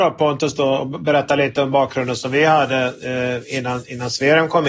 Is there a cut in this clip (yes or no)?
no